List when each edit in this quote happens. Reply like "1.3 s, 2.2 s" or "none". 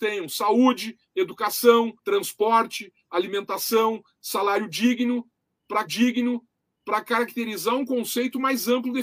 2.0 s, 5.9 s